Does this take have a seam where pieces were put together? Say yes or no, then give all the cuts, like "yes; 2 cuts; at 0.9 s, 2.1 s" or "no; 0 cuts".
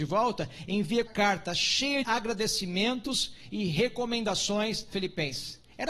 yes; 3 cuts; at 1.1 s, 2.0 s, 4.9 s